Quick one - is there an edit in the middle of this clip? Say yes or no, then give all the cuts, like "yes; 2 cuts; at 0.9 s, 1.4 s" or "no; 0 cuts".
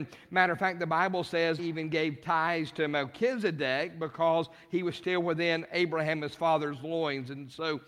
yes; 1 cut; at 1.6 s